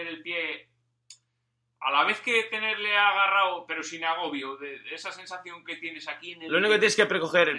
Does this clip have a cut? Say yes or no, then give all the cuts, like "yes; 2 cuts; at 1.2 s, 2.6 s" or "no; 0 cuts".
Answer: no; 0 cuts